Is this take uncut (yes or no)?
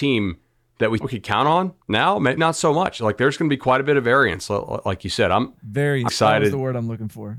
no